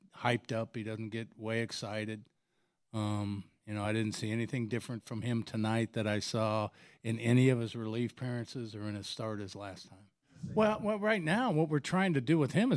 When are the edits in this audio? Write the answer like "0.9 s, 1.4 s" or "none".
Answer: none